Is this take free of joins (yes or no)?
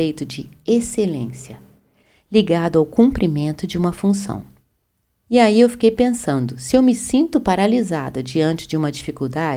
yes